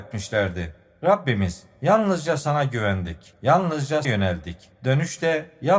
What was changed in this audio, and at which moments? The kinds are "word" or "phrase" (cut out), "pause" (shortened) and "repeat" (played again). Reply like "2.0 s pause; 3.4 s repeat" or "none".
4.0 s word